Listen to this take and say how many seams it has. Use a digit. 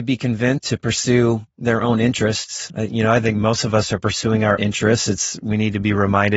1